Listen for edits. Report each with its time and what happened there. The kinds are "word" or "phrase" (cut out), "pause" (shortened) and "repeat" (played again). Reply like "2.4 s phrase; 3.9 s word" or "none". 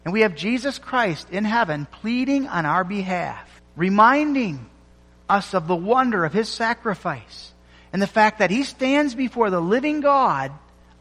3.6 s pause

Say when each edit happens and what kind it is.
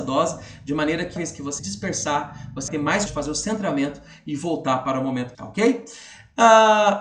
1.2 s word; 1.6 s word; 2.7 s word; 3.1 s word; 5.3 s word

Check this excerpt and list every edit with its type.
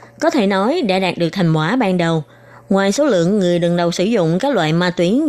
none

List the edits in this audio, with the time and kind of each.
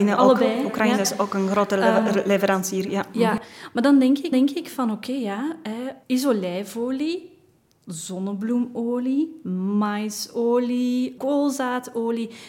4.3 s repeat; 6.0 s pause; 11.2 s word

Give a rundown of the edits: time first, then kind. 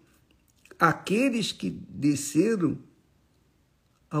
none

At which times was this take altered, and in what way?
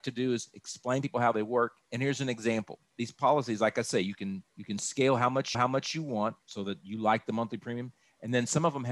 1.8 s pause; 4.5 s pause; 5.5 s repeat; 6.4 s pause

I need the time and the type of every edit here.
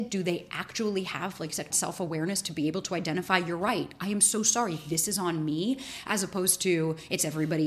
1.7 s phrase

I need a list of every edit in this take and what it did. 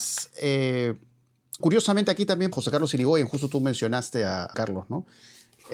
1.6 s word; 2.5 s word; 4.5 s word

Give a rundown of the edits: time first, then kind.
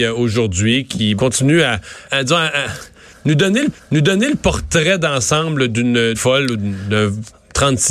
1.2 s word; 2.1 s word; 3.7 s repeat; 6.1 s phrase

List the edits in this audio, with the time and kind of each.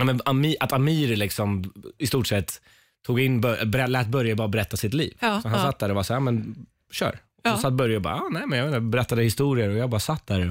none

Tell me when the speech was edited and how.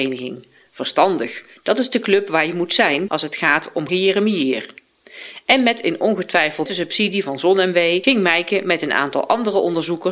3.9 s phrase; 6.7 s word

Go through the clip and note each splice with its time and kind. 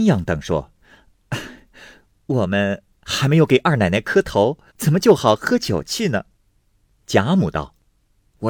4.7 s pause; 6.3 s pause

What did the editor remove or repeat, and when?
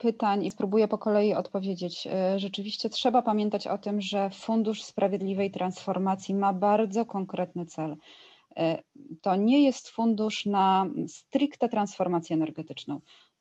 none

